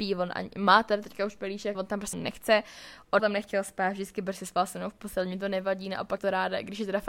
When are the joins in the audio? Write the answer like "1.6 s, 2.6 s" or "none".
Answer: 1.7 s, 2.1 s, 3.2 s, 6.2 s